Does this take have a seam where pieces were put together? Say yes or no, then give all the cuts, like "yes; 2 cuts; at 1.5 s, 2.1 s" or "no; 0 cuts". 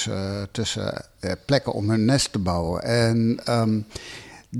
no; 0 cuts